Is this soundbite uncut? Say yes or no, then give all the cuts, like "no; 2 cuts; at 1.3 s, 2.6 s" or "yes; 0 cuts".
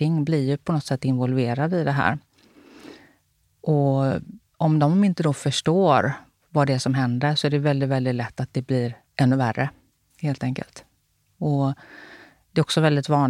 no; 1 cut; at 9.1 s